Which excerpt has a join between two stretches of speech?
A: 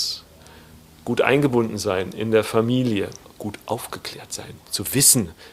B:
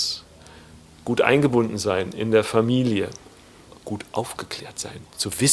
A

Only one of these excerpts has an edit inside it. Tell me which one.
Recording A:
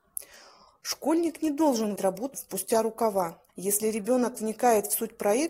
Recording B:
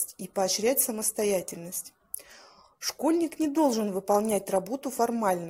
A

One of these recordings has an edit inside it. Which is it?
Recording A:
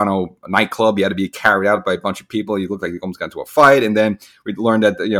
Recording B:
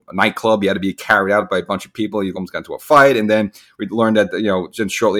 B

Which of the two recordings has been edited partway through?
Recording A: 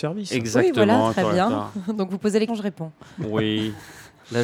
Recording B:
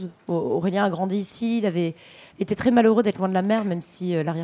A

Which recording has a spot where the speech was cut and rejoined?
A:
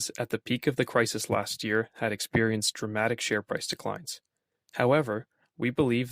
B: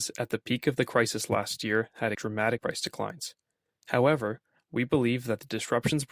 B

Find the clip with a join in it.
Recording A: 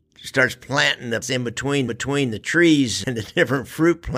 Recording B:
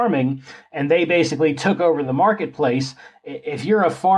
A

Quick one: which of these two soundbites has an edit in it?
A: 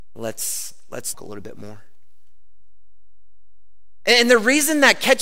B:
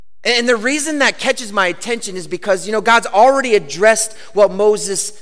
A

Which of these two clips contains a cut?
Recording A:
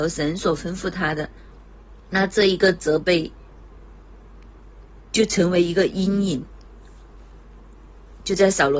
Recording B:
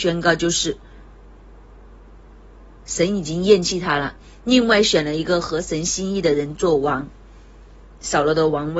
A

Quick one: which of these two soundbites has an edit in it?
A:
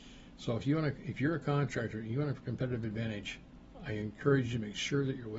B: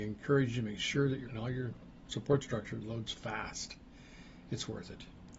B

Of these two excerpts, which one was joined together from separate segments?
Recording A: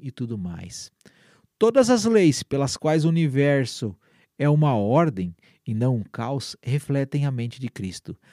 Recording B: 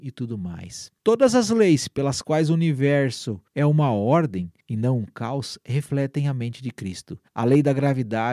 B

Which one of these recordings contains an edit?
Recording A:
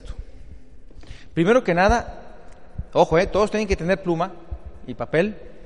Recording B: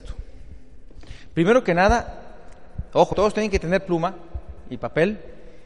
B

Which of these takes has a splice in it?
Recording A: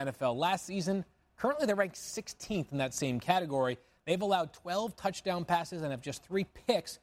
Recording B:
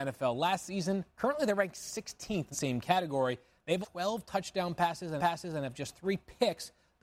B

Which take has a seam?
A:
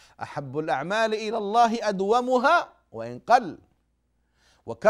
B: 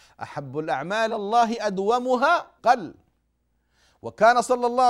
B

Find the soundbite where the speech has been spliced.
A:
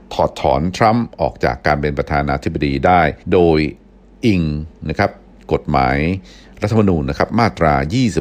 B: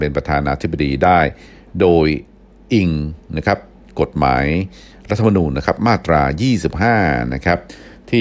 A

